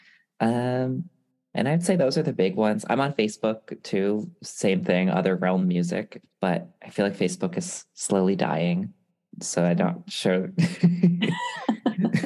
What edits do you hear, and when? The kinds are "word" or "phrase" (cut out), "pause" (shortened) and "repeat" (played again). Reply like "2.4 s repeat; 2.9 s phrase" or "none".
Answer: none